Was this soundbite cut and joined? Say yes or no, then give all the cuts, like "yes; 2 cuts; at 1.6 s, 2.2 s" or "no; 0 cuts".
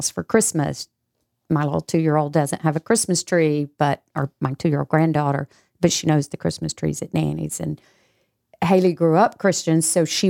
no; 0 cuts